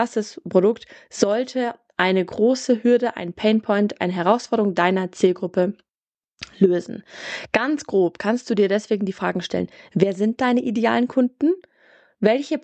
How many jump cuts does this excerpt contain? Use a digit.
0